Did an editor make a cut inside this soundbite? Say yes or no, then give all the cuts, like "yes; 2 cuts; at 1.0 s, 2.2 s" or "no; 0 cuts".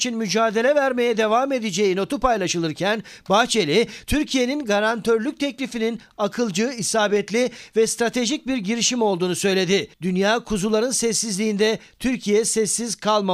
yes; 1 cut; at 9.9 s